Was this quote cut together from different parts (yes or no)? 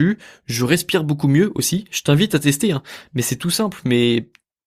no